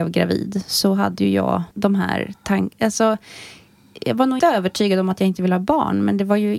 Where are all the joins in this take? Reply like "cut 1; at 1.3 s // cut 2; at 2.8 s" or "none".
cut 1; at 1.7 s // cut 2; at 4.4 s